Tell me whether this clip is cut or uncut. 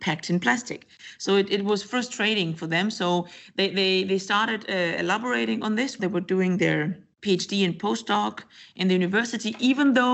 cut